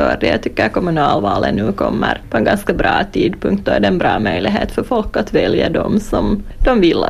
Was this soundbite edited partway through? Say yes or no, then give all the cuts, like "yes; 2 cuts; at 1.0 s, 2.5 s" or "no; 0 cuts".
no; 0 cuts